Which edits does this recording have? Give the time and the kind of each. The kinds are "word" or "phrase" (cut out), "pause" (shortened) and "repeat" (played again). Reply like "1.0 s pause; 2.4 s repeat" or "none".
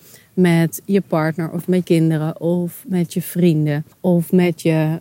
1.8 s word; 3.9 s pause

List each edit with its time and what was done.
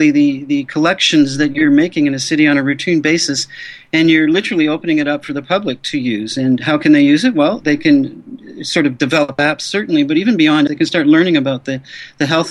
10.7 s word

